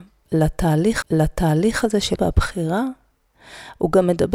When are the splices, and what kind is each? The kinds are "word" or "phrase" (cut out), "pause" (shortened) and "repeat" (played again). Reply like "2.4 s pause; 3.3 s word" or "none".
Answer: 1.0 s repeat; 2.2 s word